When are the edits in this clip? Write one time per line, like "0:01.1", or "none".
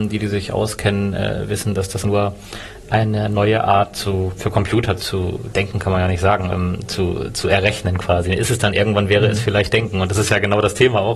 0:02.0
0:04.4
0:05.0
0:06.5